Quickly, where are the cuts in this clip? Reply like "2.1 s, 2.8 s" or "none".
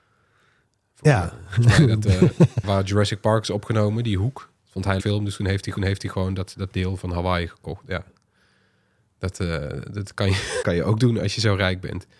2.6 s, 4.6 s, 5.0 s, 5.8 s, 10.6 s